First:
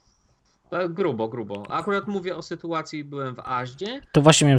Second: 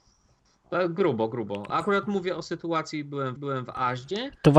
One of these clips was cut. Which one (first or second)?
second